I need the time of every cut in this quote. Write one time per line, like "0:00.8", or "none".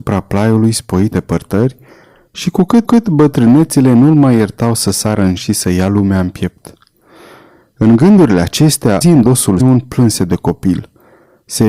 0:01.1
0:02.8
0:05.4
0:09.0
0:09.6